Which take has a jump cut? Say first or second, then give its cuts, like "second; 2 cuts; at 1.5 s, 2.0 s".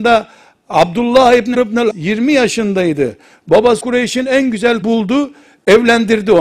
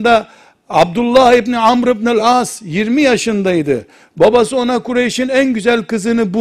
first; 4 cuts; at 1.5 s, 1.9 s, 3.8 s, 4.8 s